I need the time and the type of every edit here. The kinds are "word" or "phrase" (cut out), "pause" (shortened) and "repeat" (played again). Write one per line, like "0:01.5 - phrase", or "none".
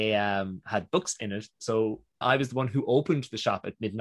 0:02.2 - word